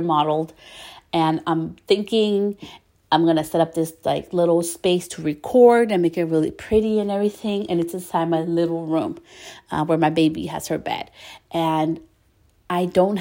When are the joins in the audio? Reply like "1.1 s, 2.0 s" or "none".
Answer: none